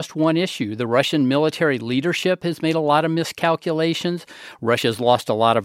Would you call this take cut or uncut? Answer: uncut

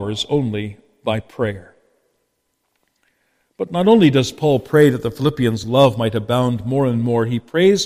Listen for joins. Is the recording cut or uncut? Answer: uncut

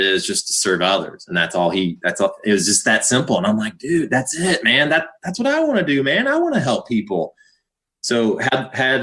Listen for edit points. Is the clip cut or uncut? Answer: uncut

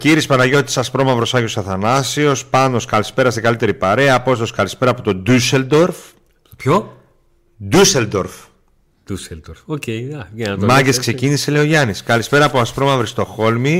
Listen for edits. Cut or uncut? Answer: uncut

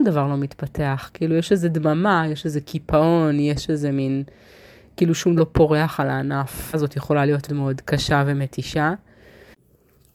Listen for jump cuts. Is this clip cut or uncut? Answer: cut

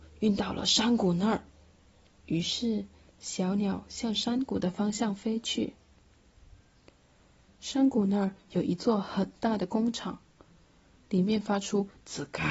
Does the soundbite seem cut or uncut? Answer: cut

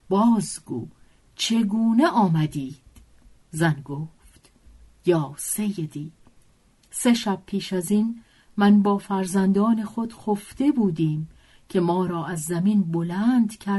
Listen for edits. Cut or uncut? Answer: uncut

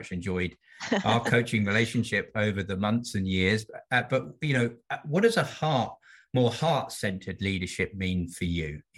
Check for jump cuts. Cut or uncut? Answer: uncut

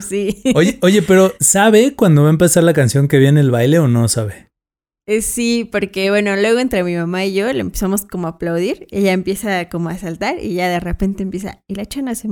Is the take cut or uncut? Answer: uncut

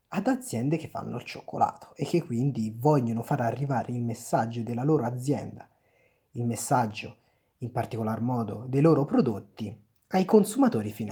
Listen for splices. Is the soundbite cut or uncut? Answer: uncut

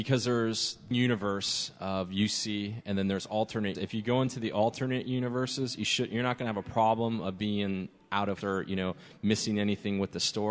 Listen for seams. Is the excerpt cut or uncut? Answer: cut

